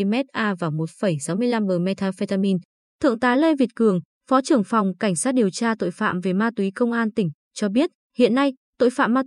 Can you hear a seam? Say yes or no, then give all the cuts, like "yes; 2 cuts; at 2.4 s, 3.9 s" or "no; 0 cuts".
no; 0 cuts